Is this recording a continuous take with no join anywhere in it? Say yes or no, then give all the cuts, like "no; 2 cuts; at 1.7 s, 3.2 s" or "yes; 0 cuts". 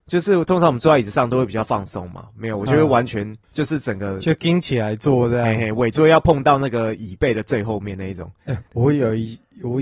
no; 2 cuts; at 3.4 s, 8.7 s